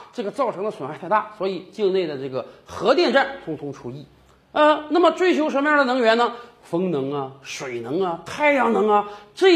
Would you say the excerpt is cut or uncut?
uncut